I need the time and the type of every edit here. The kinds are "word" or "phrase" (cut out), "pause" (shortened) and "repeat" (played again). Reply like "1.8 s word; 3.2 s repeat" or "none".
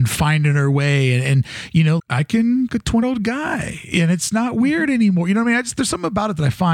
2.0 s word; 2.7 s word; 3.0 s word